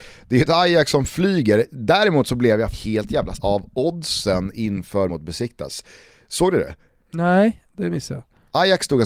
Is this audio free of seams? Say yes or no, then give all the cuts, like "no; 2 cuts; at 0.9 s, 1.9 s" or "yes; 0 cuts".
no; 3 cuts; at 2.7 s, 3.4 s, 5.1 s